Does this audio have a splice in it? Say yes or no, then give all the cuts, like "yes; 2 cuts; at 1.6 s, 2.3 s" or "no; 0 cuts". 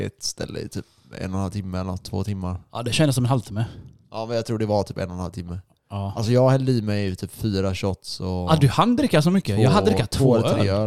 no; 0 cuts